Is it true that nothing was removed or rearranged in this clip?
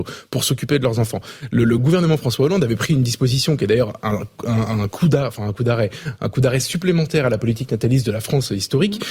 yes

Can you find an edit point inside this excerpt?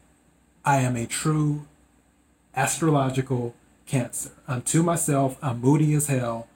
no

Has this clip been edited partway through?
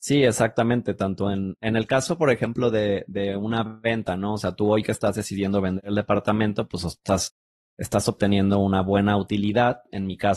no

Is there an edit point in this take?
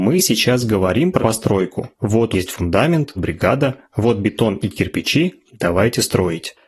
yes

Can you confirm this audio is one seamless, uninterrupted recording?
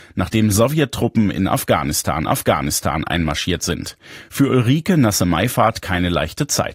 no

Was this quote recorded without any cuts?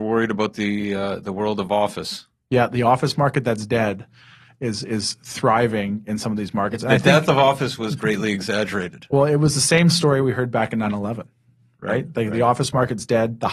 yes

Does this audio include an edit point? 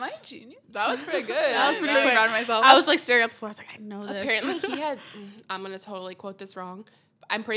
no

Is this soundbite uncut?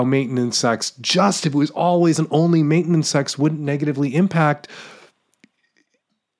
yes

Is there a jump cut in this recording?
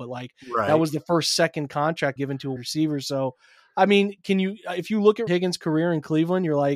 yes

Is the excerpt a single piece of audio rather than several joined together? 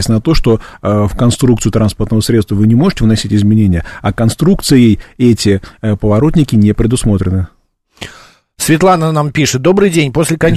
yes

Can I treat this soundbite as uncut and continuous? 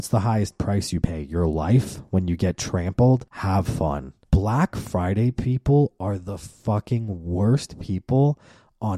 no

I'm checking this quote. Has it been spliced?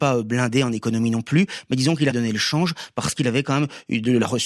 yes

